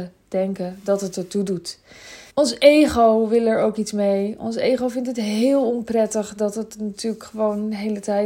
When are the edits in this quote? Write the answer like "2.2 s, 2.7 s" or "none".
2.3 s